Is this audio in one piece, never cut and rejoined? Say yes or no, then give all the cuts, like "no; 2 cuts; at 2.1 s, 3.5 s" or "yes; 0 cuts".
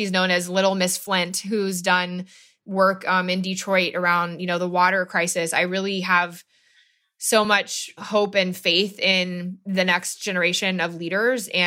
yes; 0 cuts